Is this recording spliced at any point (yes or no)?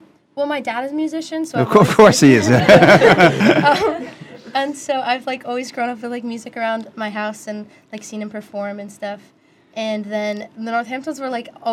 no